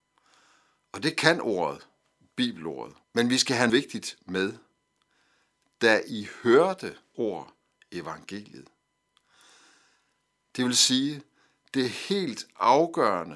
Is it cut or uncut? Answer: cut